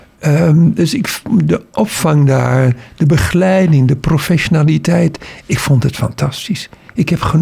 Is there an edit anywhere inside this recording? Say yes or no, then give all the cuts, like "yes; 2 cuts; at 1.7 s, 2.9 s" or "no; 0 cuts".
no; 0 cuts